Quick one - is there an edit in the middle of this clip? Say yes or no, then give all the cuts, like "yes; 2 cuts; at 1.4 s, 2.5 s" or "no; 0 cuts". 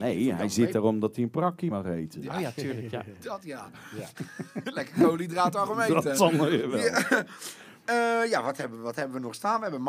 yes; 1 cut; at 1.7 s